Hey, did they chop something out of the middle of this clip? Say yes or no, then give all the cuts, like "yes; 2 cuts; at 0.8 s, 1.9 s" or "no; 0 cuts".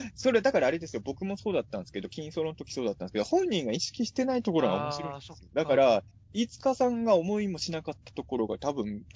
yes; 1 cut; at 6.1 s